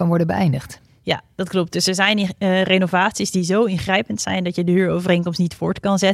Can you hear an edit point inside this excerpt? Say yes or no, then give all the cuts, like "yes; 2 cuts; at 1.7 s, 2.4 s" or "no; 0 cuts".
no; 0 cuts